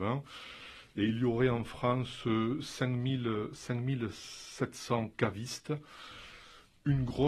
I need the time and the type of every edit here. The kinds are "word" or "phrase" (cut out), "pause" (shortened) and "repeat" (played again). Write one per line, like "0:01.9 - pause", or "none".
none